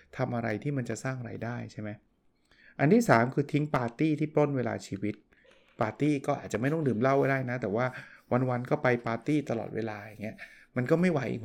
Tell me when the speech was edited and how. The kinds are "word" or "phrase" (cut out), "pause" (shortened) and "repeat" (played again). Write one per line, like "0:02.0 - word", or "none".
none